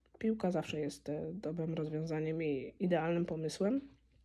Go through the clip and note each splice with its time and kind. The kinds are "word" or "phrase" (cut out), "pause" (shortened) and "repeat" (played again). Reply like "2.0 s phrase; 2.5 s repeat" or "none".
none